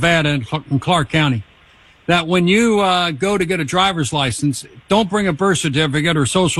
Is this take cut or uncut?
uncut